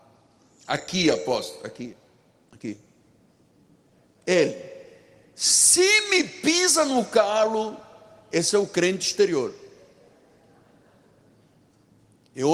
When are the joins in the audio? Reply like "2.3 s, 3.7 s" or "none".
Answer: none